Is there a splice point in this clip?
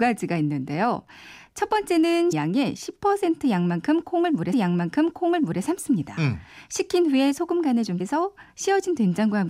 yes; 3 cuts; at 2.3 s, 4.5 s, 8.0 s

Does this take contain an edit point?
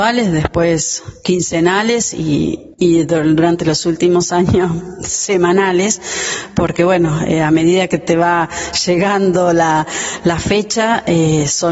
no; 0 cuts

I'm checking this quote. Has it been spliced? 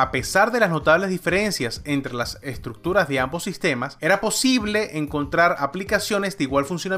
no; 0 cuts

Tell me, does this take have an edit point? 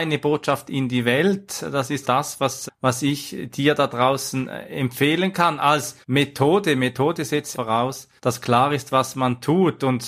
yes; 5 cuts; at 2.0 s, 2.7 s, 6.0 s, 7.5 s, 8.2 s

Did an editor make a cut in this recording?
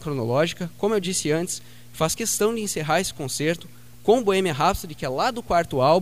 no; 0 cuts

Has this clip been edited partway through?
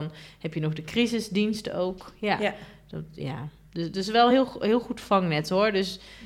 no; 0 cuts

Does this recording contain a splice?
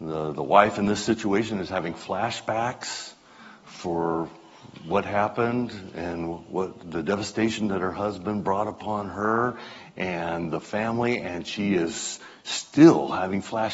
no; 0 cuts

